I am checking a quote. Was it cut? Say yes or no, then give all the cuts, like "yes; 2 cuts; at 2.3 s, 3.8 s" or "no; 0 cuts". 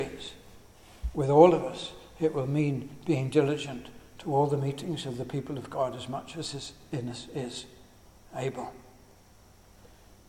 no; 0 cuts